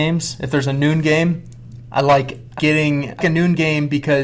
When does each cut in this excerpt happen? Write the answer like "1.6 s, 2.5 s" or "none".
2.6 s, 3.2 s